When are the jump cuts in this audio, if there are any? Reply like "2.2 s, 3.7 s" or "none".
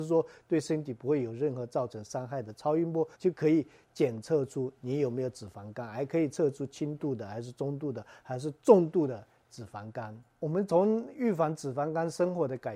3.1 s